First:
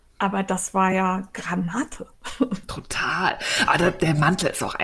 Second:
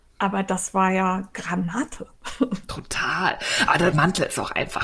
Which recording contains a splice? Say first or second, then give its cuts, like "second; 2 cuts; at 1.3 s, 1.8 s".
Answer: second; 1 cut; at 3.9 s